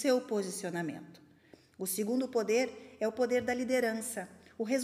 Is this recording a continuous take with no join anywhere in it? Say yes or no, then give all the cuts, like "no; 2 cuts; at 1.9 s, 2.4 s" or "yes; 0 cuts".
yes; 0 cuts